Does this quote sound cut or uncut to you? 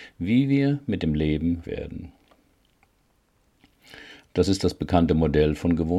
cut